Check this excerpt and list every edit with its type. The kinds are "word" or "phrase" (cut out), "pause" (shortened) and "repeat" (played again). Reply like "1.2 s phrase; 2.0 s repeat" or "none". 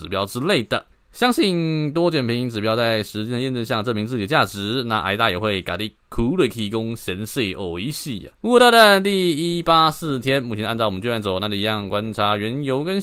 0.9 s pause; 8.3 s pause